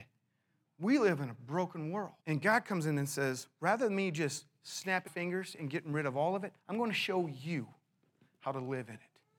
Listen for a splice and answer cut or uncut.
cut